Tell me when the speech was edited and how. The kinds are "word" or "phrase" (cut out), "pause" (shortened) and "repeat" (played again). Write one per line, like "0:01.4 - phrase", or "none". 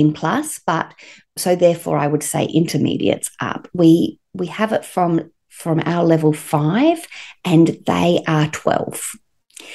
0:01.4 - word